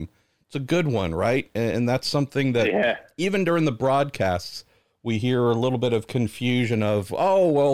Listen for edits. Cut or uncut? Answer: uncut